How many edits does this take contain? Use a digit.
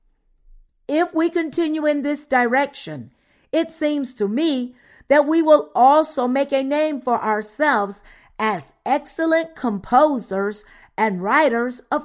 0